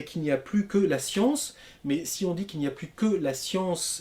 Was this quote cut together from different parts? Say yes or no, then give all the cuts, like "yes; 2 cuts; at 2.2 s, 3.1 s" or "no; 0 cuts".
no; 0 cuts